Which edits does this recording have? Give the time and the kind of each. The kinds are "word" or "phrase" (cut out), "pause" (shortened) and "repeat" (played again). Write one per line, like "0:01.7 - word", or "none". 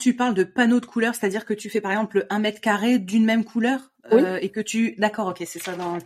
0:04.0 - pause